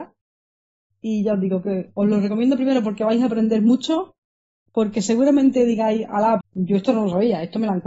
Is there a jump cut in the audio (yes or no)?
yes